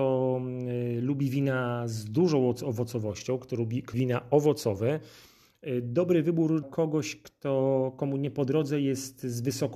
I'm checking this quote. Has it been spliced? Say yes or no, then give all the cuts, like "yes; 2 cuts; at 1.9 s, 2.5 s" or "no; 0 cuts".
yes; 2 cuts; at 3.9 s, 6.6 s